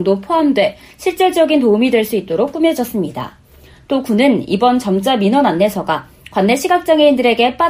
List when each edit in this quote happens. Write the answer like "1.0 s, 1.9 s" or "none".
none

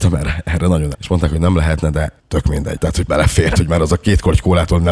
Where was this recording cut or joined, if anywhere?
0.9 s, 2.2 s, 2.8 s, 3.1 s, 3.5 s

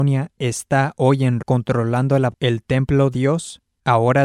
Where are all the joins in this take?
1.4 s, 2.3 s, 3.1 s

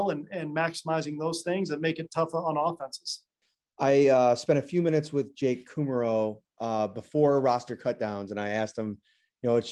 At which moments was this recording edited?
3.4 s

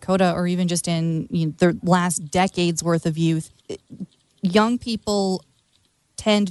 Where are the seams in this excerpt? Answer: 3.6 s

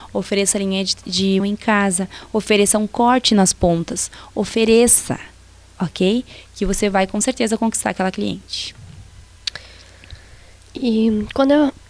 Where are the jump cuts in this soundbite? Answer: 1.4 s

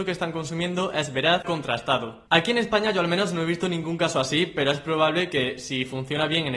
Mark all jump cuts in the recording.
1.4 s

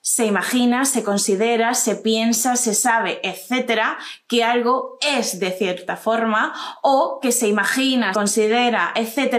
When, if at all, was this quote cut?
8.1 s

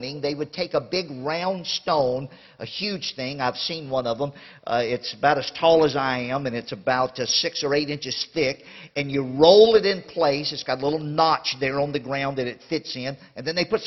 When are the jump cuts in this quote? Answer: none

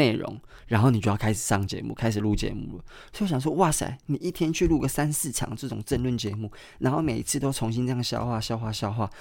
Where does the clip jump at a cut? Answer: none

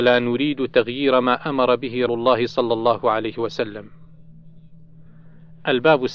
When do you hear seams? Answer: 2.1 s

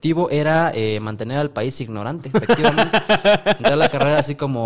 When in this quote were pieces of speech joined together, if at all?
none

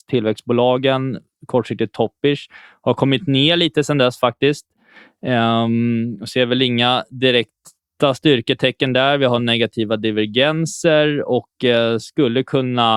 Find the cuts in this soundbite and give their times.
none

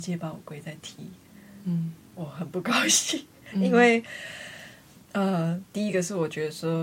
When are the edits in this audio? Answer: 5.0 s

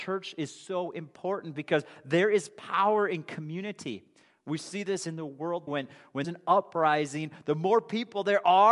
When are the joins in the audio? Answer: 5.7 s, 6.2 s

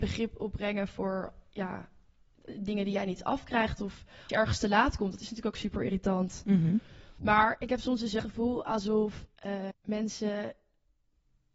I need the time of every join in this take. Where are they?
4.3 s, 8.2 s, 9.7 s

